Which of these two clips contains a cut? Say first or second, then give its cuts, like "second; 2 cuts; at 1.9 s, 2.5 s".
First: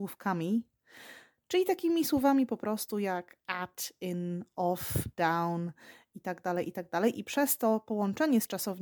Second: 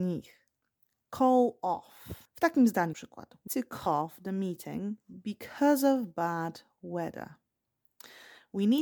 second; 4 cuts; at 2.3 s, 2.9 s, 3.5 s, 3.9 s